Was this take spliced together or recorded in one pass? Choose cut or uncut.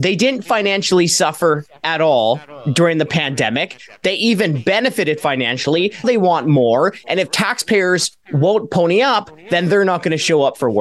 cut